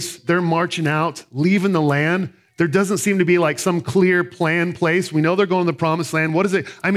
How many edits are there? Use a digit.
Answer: 0